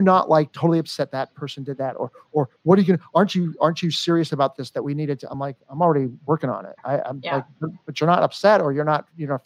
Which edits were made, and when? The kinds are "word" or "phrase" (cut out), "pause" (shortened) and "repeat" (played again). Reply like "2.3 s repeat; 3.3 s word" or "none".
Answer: none